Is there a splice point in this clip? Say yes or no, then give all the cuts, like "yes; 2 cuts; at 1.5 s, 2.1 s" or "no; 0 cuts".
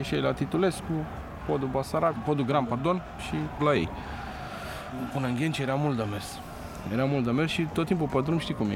yes; 1 cut; at 3.6 s